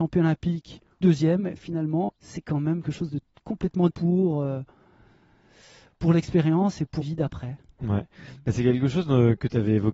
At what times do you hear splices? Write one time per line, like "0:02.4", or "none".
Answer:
0:01.0
0:01.6
0:02.1
0:02.8
0:03.9
0:07.0